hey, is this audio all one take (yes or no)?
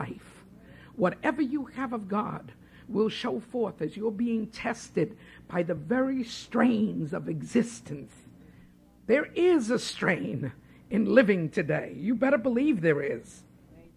yes